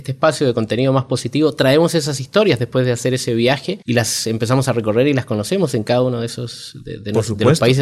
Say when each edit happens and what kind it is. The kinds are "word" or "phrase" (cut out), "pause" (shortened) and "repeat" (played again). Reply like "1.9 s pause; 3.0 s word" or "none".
3.8 s pause